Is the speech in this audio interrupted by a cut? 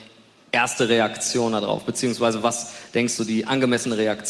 yes; 1 cut; at 3.2 s

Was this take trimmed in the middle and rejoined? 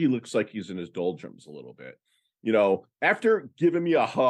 no; 0 cuts

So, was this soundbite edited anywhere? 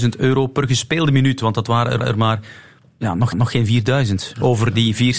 yes; 2 cuts; at 2.0 s, 3.3 s

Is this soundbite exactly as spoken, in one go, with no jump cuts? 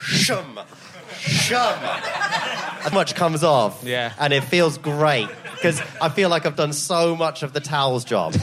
no; 2 cuts; at 2.9 s, 6.5 s

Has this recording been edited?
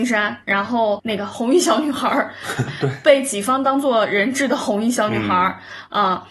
yes; 1 cut; at 2.6 s

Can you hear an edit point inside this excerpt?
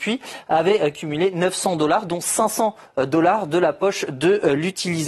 no; 0 cuts

